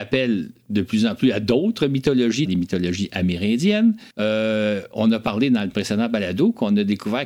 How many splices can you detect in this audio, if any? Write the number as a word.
two